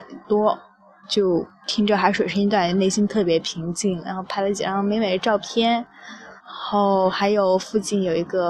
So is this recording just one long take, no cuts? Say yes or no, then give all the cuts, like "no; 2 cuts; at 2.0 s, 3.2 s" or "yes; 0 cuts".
no; 1 cut; at 6.4 s